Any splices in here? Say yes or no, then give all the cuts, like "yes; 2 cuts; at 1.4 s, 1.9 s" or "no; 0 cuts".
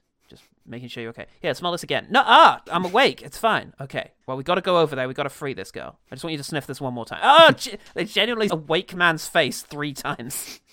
yes; 3 cuts; at 2.7 s, 4.2 s, 8.5 s